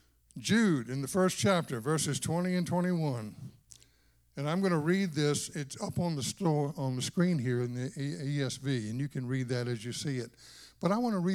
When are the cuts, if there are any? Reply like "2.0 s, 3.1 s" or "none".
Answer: none